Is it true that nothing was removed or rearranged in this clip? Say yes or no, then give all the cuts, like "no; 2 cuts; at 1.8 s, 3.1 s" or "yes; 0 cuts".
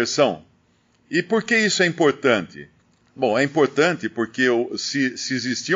yes; 0 cuts